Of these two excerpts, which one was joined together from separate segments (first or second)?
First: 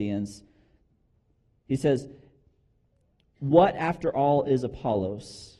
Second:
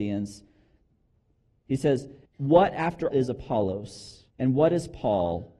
second